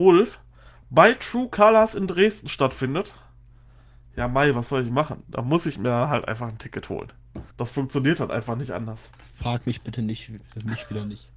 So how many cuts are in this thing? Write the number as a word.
two